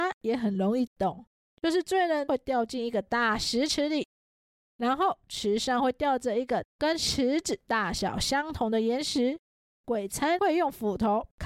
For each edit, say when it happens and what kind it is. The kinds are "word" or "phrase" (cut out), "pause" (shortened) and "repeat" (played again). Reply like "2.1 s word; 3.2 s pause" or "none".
none